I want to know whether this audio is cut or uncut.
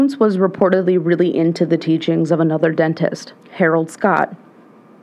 cut